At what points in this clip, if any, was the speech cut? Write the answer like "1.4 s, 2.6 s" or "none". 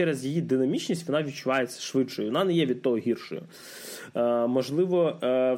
none